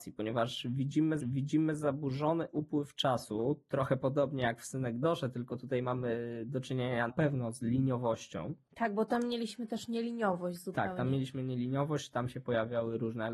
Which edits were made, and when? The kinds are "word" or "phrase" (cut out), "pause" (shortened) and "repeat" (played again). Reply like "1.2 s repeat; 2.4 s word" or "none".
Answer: 1.2 s repeat; 7.1 s word